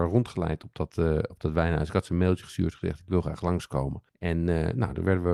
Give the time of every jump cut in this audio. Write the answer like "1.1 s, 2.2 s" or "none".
4.1 s